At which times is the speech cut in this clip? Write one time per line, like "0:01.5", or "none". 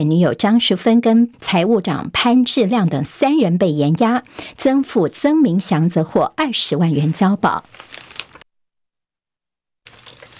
0:01.3